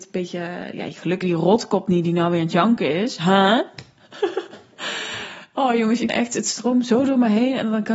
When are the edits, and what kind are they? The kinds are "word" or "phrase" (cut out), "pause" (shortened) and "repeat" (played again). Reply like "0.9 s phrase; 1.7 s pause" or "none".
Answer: 1.2 s word; 6.1 s word